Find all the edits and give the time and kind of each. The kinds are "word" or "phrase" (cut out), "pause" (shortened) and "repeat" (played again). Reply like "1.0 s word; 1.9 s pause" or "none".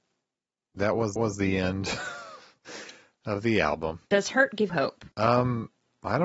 1.2 s repeat; 4.1 s pause; 4.7 s word; 5.1 s pause